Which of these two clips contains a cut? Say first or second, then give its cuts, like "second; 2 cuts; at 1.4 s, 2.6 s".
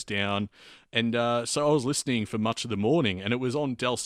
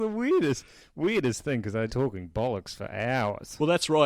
second; 1 cut; at 1.9 s